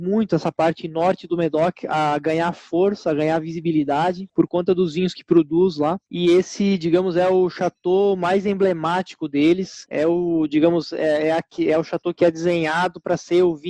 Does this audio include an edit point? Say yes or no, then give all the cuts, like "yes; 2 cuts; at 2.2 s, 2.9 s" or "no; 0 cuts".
no; 0 cuts